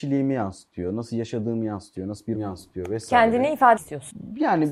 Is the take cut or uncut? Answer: cut